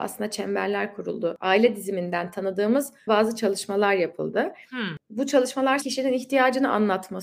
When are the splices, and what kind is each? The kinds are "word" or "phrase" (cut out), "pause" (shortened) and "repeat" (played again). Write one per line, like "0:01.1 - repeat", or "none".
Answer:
0:03.1 - word
0:05.8 - word